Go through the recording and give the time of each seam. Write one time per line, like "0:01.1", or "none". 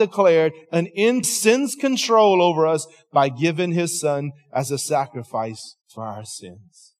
0:01.2
0:05.8